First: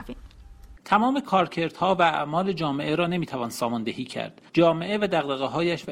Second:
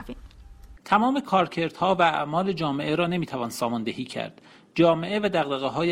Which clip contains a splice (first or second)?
first